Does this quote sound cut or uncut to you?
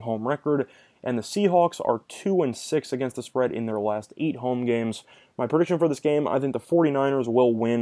uncut